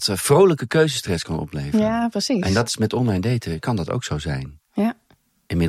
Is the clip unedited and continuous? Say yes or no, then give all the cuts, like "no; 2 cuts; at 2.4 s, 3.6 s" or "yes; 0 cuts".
yes; 0 cuts